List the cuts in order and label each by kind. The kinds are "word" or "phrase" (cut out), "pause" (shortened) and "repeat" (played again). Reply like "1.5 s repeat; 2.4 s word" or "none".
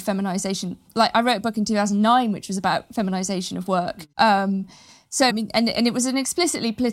4.1 s pause; 5.3 s word